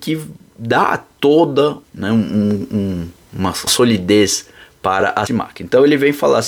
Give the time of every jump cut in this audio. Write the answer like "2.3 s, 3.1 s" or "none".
1.8 s, 3.7 s, 5.3 s